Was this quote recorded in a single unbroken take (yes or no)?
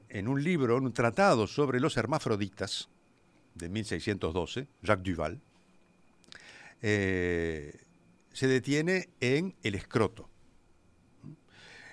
yes